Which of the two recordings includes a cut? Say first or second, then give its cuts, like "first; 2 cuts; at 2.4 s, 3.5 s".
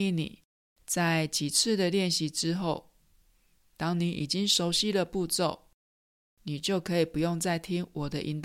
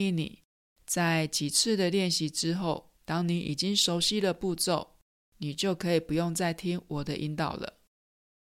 second; 2 cuts; at 3.0 s, 5.1 s